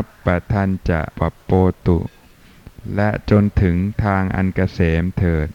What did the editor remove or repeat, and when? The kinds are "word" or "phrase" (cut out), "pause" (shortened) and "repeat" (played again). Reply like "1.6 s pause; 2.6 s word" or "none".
1.1 s pause